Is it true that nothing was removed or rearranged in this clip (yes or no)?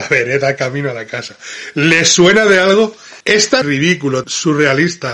no